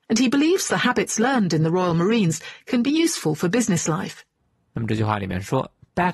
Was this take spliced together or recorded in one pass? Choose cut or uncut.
uncut